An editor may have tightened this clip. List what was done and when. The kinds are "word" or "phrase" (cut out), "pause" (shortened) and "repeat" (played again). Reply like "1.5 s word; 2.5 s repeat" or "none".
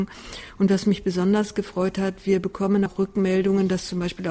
2.9 s word